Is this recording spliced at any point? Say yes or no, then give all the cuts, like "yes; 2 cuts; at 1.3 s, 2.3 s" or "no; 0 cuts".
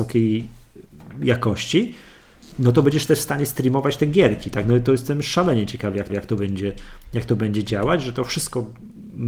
yes; 1 cut; at 6.1 s